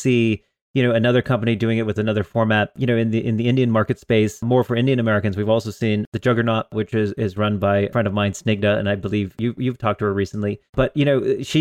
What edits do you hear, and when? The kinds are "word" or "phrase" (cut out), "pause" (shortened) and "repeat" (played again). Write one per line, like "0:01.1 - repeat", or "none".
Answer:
0:10.7 - pause

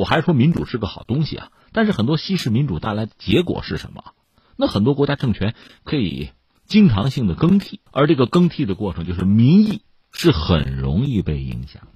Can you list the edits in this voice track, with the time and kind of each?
0:07.9 - pause

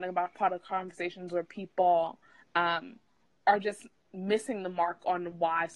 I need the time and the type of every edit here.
none

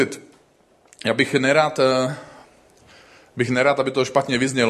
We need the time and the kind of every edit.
none

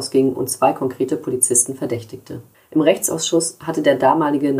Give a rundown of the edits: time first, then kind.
0:02.5 - pause

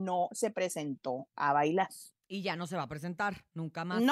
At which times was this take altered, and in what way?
none

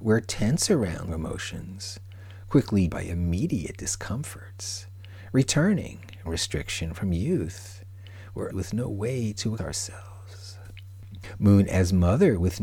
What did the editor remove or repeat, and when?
0:01.1 - word
0:02.9 - word
0:06.3 - word
0:08.5 - word
0:09.6 - word

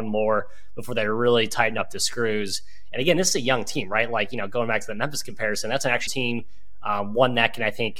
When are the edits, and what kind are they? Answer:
0:06.1 - phrase

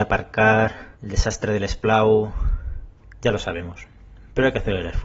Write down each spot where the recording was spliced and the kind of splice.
0:00.9 - pause

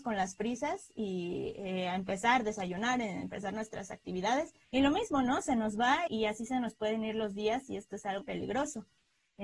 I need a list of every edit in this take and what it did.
0:04.6 - pause
0:06.1 - word
0:08.2 - word

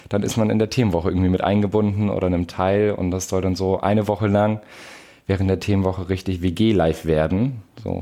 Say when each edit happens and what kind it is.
none

